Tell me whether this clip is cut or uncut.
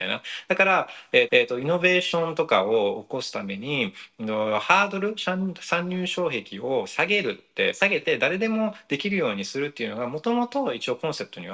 cut